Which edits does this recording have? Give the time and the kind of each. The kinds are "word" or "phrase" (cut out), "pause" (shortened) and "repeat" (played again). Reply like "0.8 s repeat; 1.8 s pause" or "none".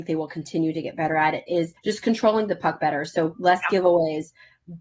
1.8 s pause